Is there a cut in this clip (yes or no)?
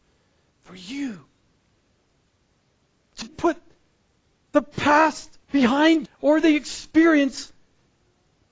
yes